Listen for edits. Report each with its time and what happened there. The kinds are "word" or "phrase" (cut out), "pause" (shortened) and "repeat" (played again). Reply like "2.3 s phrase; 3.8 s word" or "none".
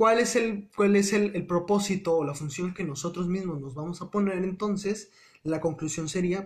none

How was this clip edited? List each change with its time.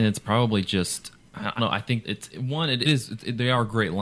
1.6 s word; 2.0 s word; 2.8 s word

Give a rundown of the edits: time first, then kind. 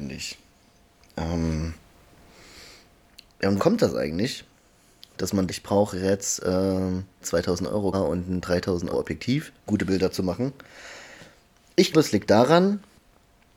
3.6 s word; 5.5 s word; 7.2 s word; 7.9 s word; 8.9 s word; 9.7 s word; 11.9 s word

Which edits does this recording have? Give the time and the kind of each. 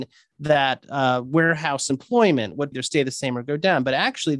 2.7 s word

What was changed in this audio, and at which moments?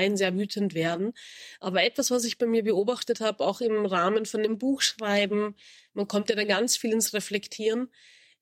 none

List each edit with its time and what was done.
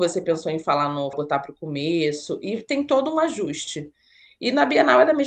1.1 s phrase

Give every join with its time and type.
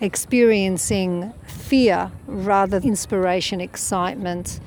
1.5 s word; 2.8 s word

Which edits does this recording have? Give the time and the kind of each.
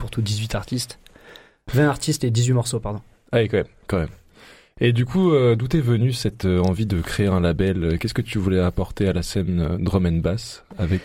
none

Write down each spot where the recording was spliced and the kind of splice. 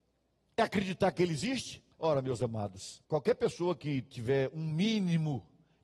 1.9 s pause; 3.0 s pause

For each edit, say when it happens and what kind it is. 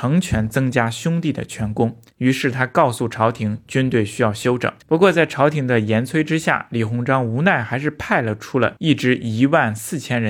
4.8 s pause

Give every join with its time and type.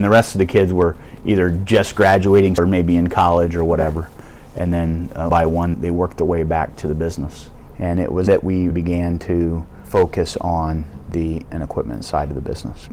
2.6 s word; 5.3 s word; 5.7 s word; 8.3 s word; 8.7 s word; 11.5 s word

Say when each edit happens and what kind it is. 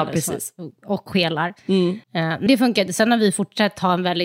2.0 s pause; 2.5 s word

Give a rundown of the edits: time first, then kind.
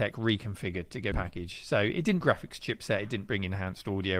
1.1 s phrase; 2.2 s phrase

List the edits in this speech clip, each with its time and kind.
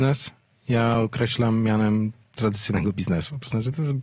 none

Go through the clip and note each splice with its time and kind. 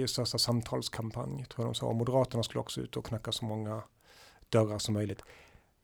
none

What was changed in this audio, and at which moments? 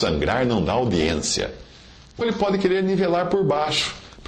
2.2 s word

